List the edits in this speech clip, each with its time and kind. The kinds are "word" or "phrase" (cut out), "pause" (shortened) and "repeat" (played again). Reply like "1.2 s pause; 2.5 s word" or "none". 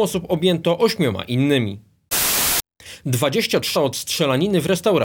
3.7 s word